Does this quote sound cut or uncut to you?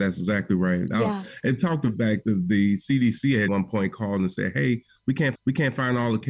cut